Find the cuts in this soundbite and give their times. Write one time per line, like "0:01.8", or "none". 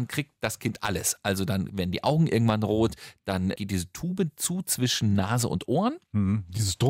none